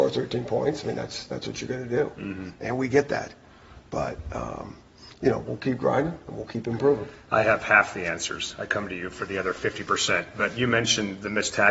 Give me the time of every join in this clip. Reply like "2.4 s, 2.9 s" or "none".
none